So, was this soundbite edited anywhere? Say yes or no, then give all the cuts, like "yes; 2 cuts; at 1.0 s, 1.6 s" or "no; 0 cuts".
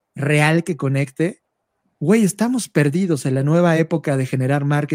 no; 0 cuts